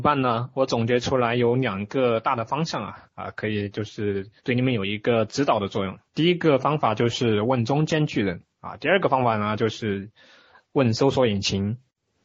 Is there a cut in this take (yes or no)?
yes